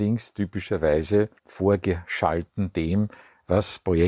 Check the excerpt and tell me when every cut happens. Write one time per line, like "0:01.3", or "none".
0:01.4